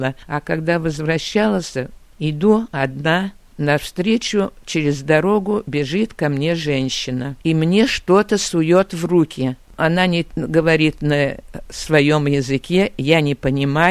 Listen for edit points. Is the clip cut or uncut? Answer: cut